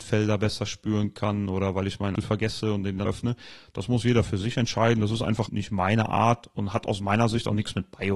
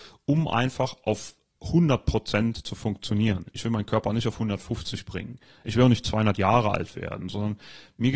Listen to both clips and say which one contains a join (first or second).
first